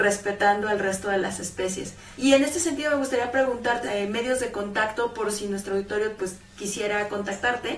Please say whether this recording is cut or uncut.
cut